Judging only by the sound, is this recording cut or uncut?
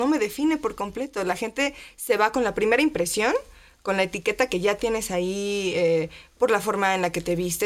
uncut